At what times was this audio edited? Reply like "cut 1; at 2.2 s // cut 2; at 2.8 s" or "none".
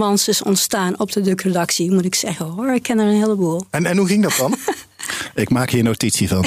none

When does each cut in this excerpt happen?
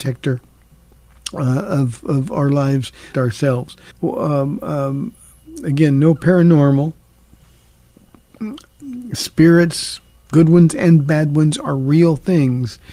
cut 1; at 3.1 s // cut 2; at 3.9 s

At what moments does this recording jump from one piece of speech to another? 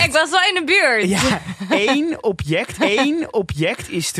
cut 1; at 2.8 s

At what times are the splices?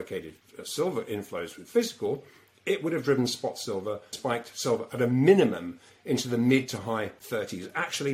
cut 1; at 4.1 s

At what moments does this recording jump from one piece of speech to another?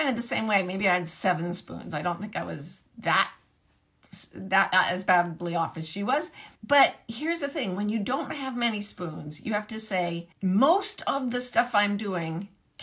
cut 1; at 2.9 s // cut 2; at 6.6 s // cut 3; at 10.3 s

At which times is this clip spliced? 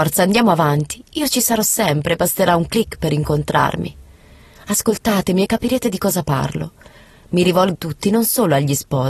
cut 1; at 7.8 s

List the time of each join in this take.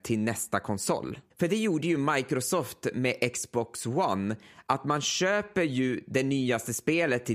cut 1; at 1.3 s

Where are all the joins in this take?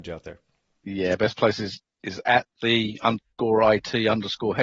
none

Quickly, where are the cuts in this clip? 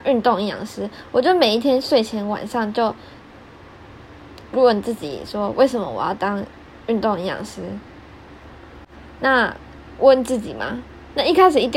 none

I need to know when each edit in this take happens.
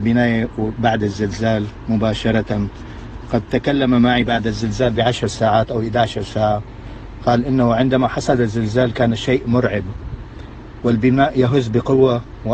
none

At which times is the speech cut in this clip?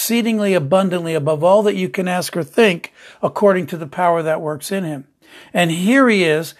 none

